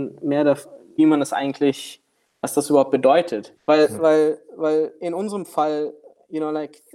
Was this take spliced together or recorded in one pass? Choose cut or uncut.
cut